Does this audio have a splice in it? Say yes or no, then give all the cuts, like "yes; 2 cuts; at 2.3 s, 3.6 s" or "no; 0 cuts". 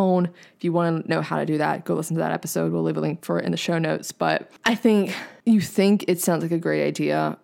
no; 0 cuts